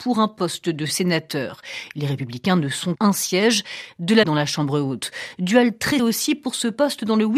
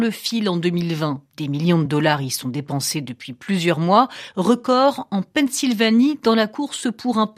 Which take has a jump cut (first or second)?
first